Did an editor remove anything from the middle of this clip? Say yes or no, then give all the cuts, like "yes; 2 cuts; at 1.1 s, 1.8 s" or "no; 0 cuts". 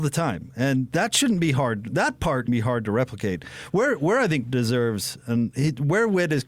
yes; 2 cuts; at 2.5 s, 4.4 s